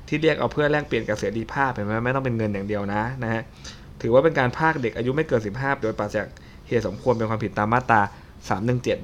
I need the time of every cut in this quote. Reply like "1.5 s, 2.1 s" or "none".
5.8 s